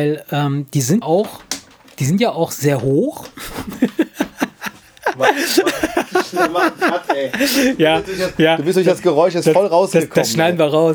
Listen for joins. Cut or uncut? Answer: cut